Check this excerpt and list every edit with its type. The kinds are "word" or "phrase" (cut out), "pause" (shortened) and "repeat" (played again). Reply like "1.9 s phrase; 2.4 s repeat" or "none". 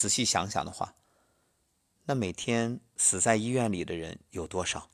none